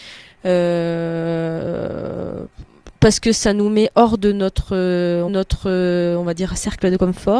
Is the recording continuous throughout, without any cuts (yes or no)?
no